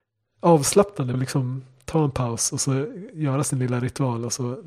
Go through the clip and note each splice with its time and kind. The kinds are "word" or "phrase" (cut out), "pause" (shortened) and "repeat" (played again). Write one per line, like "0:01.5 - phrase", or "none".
0:01.1 - word